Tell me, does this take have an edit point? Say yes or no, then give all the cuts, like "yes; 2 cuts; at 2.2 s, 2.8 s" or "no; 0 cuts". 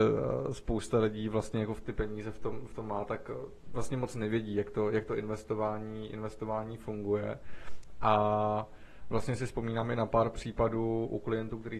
no; 0 cuts